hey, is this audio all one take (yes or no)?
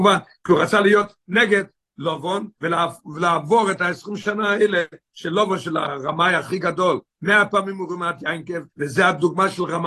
no